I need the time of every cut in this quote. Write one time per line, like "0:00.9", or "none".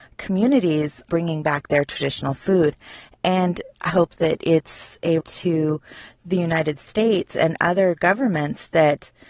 0:01.1
0:03.9
0:05.2